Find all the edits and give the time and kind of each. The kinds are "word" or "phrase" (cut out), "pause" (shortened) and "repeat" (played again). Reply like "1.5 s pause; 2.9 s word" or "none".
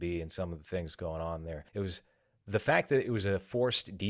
1.7 s pause